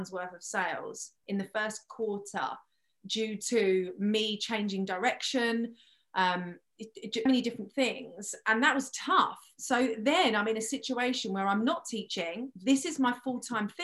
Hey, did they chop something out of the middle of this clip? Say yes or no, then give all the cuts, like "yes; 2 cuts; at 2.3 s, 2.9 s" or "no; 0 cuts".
yes; 2 cuts; at 1.2 s, 7.3 s